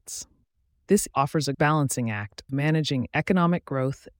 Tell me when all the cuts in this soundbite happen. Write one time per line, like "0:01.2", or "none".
0:01.1
0:01.5
0:02.5